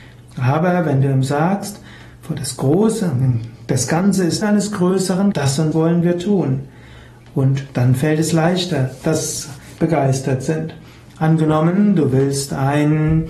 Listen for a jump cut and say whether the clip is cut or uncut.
cut